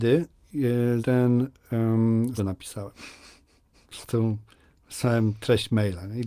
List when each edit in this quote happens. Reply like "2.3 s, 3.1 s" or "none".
1.0 s, 2.4 s